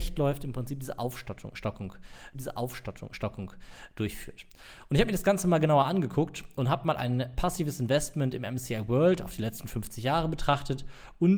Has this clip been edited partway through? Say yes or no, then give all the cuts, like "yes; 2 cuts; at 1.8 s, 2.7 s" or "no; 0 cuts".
yes; 1 cut; at 2.3 s